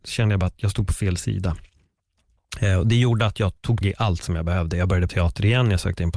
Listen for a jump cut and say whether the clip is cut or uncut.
cut